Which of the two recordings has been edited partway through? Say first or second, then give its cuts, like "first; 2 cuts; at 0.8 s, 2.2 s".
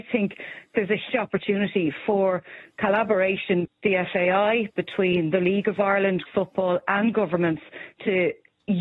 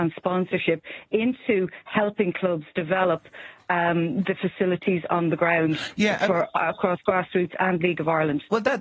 first; 3 cuts; at 1.1 s, 3.6 s, 6.3 s